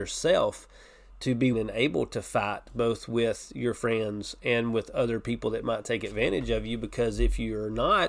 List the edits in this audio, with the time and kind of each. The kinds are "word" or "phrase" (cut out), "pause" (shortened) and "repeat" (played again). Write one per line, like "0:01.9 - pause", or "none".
0:01.5 - word